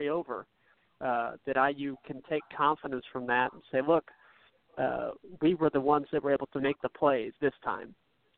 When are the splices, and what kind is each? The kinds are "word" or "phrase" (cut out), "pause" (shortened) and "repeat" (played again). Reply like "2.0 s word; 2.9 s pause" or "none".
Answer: 7.4 s pause